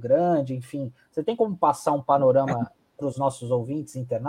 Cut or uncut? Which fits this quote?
uncut